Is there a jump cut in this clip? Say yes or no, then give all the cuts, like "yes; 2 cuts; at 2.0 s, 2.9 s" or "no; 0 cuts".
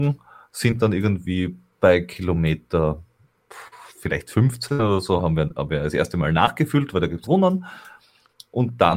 yes; 2 cuts; at 5.2 s, 7.2 s